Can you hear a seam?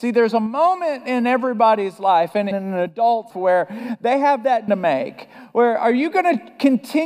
yes; 3 cuts; at 2.5 s, 3.3 s, 4.7 s

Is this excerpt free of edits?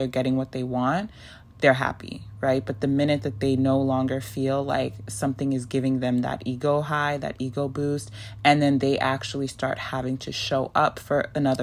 yes; 0 cuts

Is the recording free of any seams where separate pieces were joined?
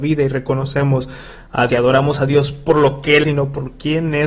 no; 3 cuts; at 1.7 s, 2.7 s, 3.2 s

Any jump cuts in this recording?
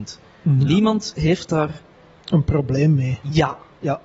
no; 0 cuts

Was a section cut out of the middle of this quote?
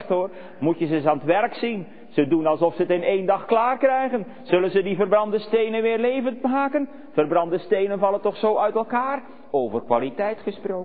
no; 0 cuts

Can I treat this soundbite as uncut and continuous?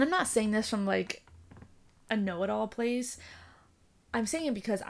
yes; 0 cuts

